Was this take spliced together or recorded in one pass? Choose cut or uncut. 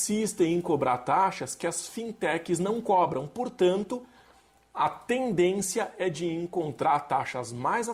uncut